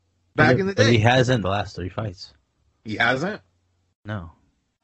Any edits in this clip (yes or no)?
yes